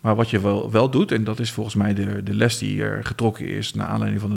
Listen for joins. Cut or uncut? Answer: uncut